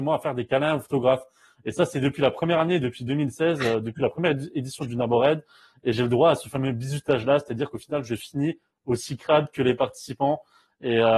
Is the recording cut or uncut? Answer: uncut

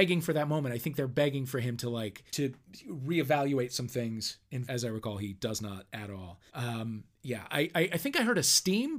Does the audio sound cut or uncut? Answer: cut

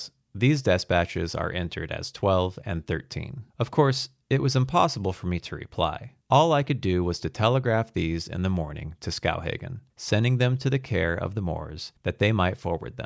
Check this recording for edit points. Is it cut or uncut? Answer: cut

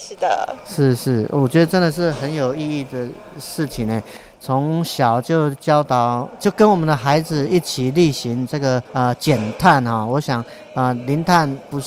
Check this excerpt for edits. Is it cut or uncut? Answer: cut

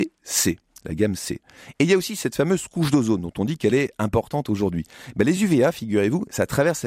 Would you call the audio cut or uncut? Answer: uncut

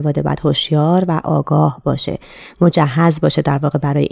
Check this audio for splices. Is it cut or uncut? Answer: uncut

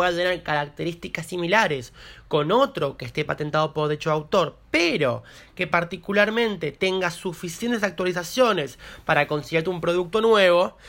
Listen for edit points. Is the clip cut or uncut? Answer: uncut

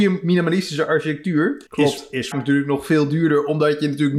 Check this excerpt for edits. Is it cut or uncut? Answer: cut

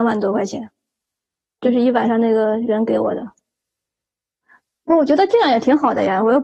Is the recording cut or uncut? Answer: uncut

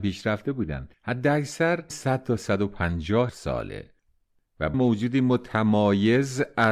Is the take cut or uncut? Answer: cut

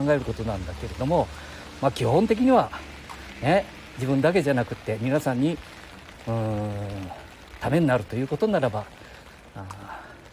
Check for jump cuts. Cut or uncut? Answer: uncut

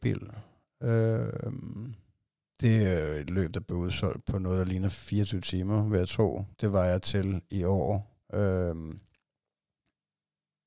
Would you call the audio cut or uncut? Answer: cut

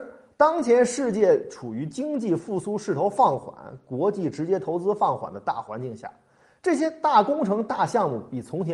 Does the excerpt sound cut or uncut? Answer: uncut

